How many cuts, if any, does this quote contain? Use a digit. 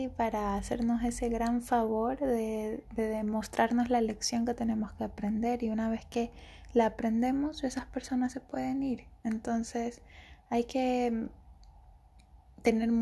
1